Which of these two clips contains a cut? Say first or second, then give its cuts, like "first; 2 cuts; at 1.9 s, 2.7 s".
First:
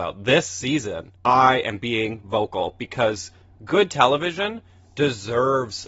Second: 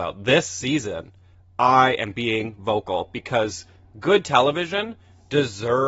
first; 1 cut; at 1.2 s